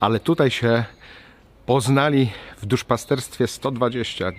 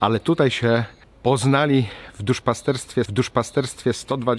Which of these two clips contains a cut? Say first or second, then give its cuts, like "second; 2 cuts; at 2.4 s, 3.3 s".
second; 2 cuts; at 1.0 s, 3.1 s